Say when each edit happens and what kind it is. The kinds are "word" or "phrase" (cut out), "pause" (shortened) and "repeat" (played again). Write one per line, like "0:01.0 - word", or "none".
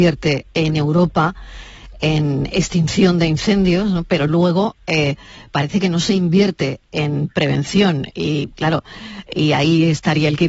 none